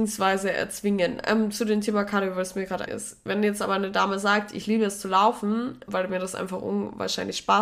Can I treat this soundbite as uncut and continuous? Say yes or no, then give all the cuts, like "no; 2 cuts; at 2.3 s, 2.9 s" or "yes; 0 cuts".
no; 2 cuts; at 2.9 s, 5.9 s